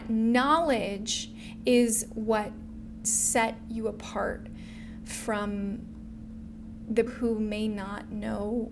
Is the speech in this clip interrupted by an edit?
yes; 2 cuts; at 3.0 s, 7.1 s

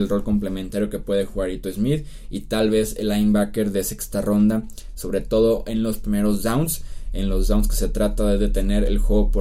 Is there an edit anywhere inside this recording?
no; 0 cuts

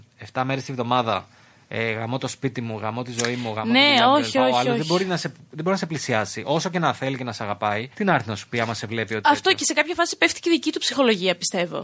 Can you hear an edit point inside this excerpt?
yes; 1 cut; at 7.9 s

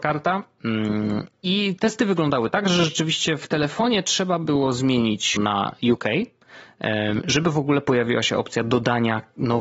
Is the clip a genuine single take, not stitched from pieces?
no; 1 cut; at 5.4 s

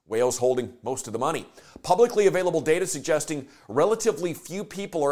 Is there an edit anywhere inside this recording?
no; 0 cuts

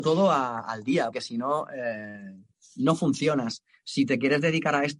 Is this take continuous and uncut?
no; 1 cut; at 1.1 s

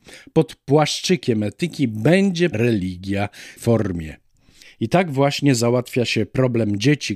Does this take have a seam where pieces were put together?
yes; 2 cuts; at 2.5 s, 3.6 s

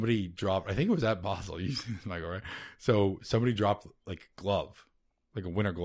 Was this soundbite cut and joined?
no; 0 cuts

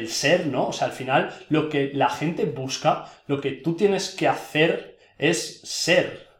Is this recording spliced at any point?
no; 0 cuts

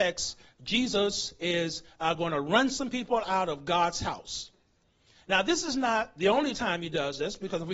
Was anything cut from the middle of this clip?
no; 0 cuts

